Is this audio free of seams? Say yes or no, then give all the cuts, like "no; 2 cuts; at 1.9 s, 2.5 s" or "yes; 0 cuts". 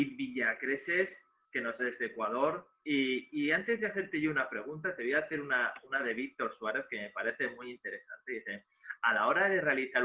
no; 2 cuts; at 1.8 s, 2.8 s